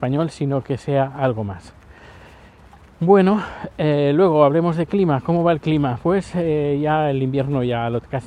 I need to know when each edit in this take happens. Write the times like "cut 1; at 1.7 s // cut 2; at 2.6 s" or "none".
none